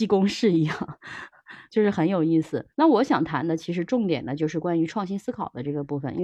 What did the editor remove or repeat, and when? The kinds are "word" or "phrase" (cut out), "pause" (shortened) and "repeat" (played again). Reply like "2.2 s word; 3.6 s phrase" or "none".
2.7 s pause